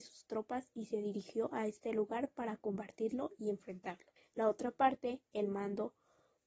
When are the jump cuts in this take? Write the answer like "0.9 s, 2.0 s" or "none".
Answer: 4.2 s